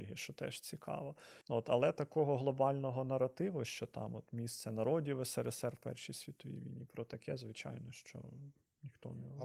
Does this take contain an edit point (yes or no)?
yes